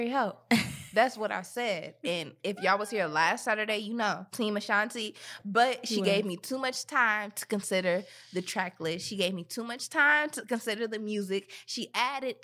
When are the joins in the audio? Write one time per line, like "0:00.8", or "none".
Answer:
0:04.3